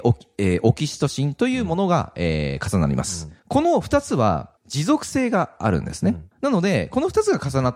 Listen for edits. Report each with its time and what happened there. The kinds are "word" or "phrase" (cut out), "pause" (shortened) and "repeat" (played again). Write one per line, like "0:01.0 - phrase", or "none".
0:03.4 - pause
0:04.6 - pause
0:06.3 - pause